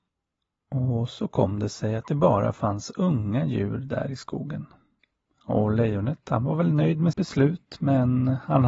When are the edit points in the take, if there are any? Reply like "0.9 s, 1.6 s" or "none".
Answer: 7.1 s